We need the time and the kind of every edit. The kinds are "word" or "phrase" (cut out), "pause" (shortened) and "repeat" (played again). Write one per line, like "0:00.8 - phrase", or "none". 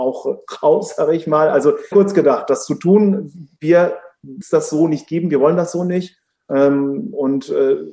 0:01.9 - phrase
0:03.6 - pause
0:04.4 - phrase